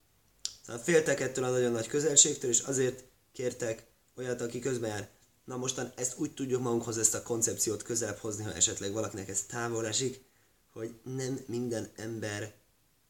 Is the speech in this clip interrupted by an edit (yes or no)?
no